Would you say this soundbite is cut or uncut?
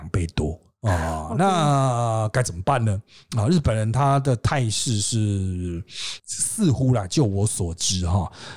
uncut